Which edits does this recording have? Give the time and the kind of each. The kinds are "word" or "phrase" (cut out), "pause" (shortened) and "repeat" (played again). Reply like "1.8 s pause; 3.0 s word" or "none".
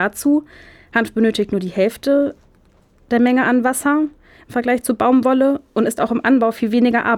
none